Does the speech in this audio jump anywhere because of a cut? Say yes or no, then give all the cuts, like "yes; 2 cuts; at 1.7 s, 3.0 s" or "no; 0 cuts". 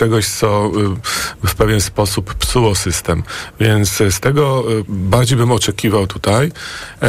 yes; 1 cut; at 4.9 s